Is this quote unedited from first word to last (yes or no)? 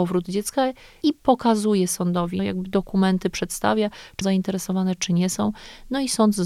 no